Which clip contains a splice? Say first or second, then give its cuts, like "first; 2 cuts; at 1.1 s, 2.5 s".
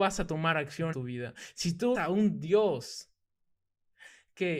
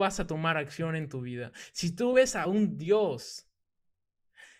first; 2 cuts; at 0.9 s, 1.9 s